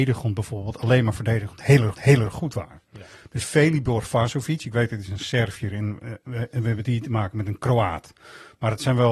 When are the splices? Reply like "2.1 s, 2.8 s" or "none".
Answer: 1.9 s